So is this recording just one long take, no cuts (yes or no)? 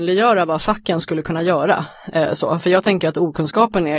yes